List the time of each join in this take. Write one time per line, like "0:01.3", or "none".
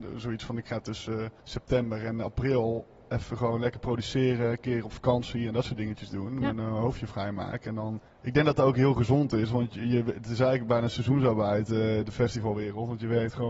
0:01.4
0:08.1